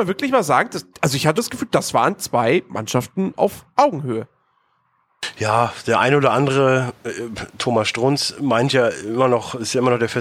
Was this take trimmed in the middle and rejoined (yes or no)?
yes